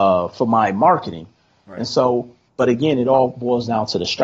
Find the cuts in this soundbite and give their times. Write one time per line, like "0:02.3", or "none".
none